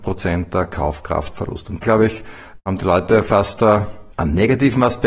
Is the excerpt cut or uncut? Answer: cut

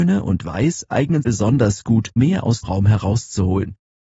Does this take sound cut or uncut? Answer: cut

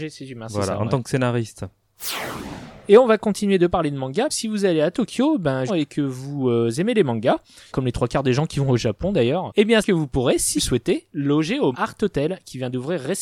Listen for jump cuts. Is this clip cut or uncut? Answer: cut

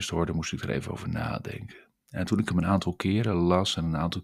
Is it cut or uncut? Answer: uncut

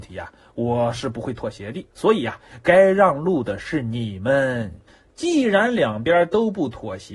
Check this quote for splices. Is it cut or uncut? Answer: cut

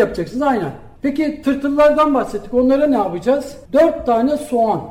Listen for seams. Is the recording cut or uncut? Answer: cut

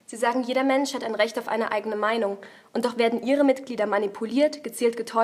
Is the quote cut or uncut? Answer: uncut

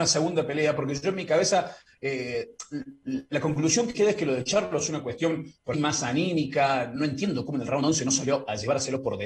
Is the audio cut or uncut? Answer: cut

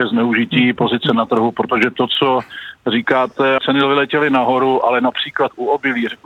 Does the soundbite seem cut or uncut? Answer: cut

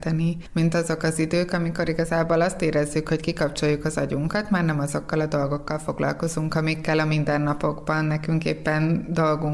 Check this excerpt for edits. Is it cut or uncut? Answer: uncut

